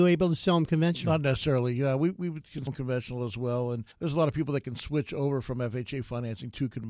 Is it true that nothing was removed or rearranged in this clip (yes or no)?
no